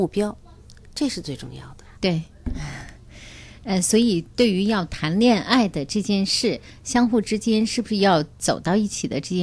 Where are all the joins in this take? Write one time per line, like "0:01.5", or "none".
0:01.9